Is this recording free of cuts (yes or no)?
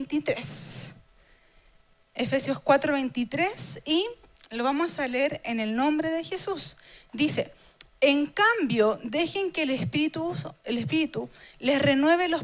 yes